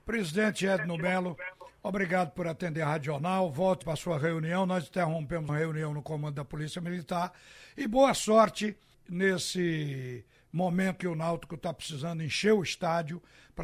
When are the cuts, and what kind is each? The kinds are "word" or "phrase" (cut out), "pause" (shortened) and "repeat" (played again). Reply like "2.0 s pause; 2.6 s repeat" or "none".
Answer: 3.8 s word; 5.5 s word; 8.9 s word; 11.0 s word

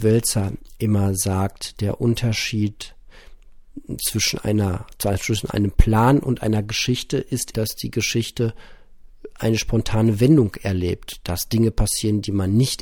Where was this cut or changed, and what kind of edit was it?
7.5 s word

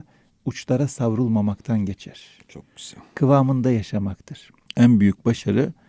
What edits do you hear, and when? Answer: 4.7 s pause

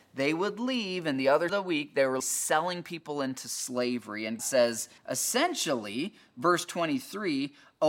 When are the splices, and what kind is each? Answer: 1.5 s phrase; 2.2 s word; 4.4 s word; 5.0 s pause

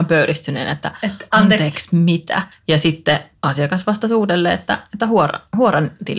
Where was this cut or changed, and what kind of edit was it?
2.5 s pause

